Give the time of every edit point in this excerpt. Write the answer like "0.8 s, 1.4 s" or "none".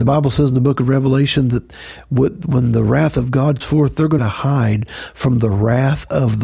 3.6 s, 4.2 s